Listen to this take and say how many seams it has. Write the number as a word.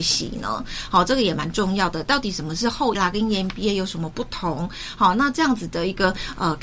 one